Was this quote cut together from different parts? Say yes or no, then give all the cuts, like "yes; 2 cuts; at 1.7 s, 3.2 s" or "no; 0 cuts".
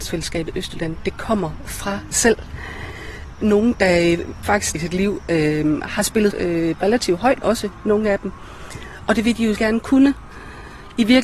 yes; 8 cuts; at 2.1 s, 3.3 s, 4.4 s, 4.7 s, 6.3 s, 6.8 s, 7.4 s, 9.6 s